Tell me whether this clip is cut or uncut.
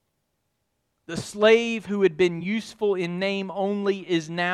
uncut